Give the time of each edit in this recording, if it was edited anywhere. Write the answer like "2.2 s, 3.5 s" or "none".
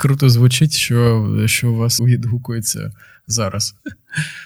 2.0 s